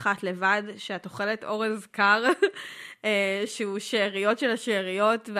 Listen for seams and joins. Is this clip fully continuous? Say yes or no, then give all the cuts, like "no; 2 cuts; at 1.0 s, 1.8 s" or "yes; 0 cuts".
yes; 0 cuts